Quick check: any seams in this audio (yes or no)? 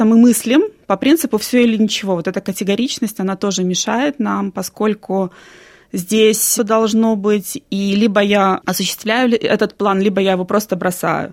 yes